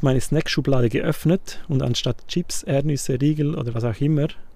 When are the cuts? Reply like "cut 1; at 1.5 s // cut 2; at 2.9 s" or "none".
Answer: none